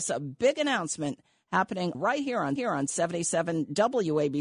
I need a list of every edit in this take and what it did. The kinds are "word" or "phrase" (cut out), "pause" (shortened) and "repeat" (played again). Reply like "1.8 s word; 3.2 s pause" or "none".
1.9 s word; 2.6 s repeat